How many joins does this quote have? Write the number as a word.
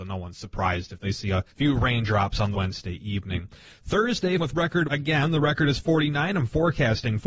four